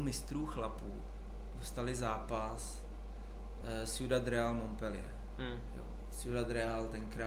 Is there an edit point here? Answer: no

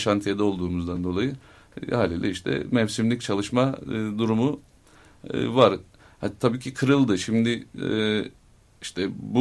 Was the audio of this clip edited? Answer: no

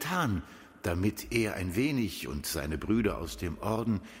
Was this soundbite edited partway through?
no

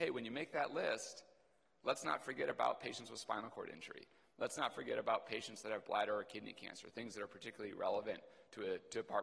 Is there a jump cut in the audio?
no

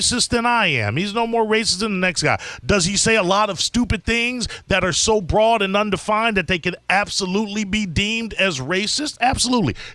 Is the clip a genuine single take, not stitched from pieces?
yes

